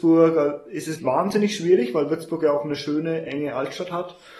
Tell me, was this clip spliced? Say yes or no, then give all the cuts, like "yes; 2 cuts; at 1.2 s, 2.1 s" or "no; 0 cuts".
yes; 1 cut; at 1.0 s